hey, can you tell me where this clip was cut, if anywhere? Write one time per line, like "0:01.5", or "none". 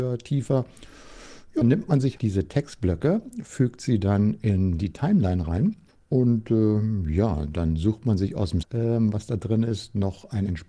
0:01.6
0:02.2
0:05.9
0:08.6

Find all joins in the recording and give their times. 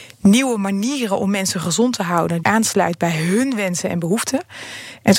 0:02.4

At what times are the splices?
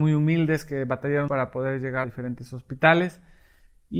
0:01.3
0:02.0

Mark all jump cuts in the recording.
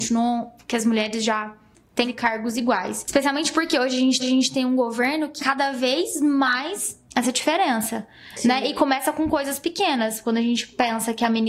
0:02.0
0:04.2
0:05.4
0:07.1

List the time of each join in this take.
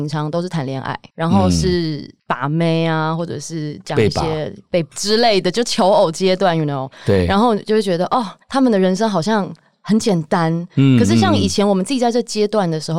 0:01.1
0:02.2
0:04.9
0:08.4

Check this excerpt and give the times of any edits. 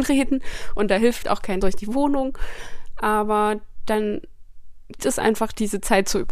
0:01.2
0:01.6
0:05.0

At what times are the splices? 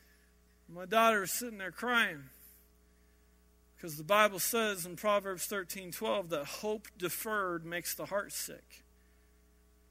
none

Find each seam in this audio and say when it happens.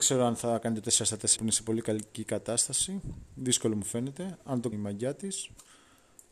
0:01.4
0:04.7

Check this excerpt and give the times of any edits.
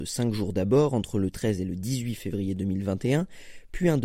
none

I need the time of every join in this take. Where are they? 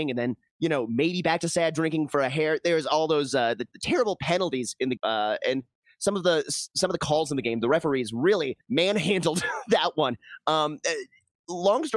0:03.7
0:05.0
0:08.6

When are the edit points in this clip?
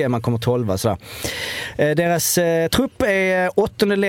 none

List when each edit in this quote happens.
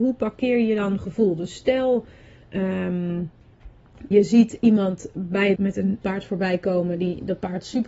0:04.1
0:05.6
0:06.0

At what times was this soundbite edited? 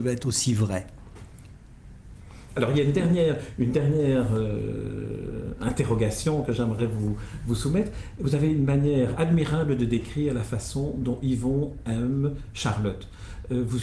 none

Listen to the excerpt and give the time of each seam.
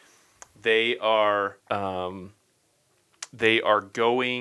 0:01.6

